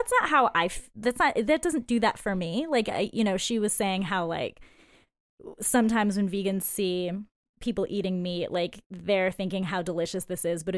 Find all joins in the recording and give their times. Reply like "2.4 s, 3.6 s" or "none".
none